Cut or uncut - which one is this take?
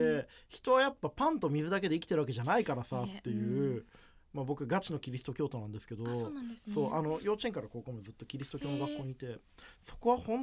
uncut